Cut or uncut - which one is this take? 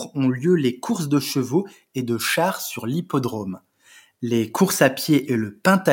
uncut